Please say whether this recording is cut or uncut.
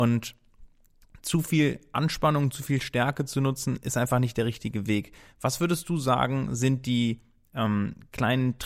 uncut